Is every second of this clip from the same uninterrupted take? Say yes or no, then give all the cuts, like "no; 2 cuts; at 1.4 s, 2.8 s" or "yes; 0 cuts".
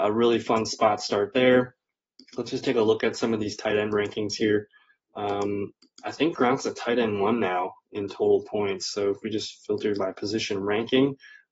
yes; 0 cuts